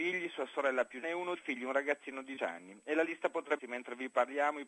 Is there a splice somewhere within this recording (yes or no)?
yes